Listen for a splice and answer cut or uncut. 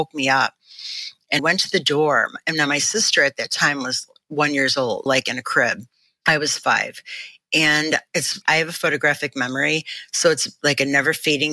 cut